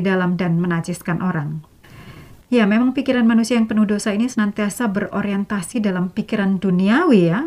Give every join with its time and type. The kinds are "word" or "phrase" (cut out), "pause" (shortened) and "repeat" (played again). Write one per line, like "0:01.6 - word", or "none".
none